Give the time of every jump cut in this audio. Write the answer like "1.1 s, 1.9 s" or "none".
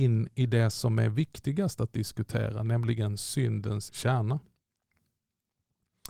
3.9 s

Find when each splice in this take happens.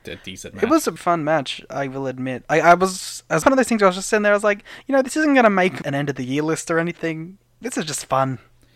1.0 s, 3.4 s, 5.8 s, 7.6 s

